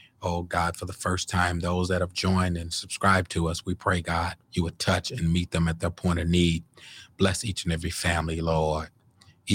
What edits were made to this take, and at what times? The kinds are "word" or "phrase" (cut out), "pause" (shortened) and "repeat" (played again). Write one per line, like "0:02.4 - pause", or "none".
0:04.4 - pause